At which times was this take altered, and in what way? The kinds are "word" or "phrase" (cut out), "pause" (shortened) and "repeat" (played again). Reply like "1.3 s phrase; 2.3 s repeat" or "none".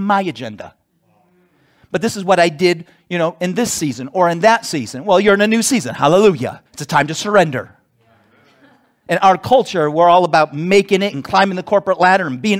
6.7 s pause